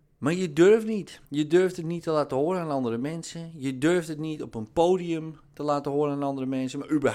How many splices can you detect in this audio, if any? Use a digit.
1